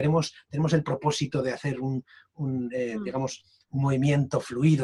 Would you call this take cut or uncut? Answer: uncut